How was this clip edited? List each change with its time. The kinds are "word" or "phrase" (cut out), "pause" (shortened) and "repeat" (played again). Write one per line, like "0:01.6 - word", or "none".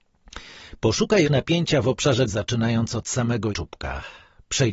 0:01.2 - word
0:02.3 - word
0:03.5 - word